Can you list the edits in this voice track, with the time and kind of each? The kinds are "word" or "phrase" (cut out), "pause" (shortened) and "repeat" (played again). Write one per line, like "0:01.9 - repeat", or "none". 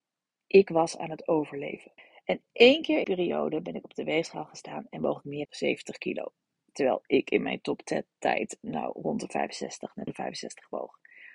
0:02.0 - pause
0:03.0 - word
0:05.4 - word
0:08.6 - word
0:10.1 - word